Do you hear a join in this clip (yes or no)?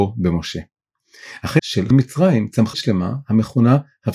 yes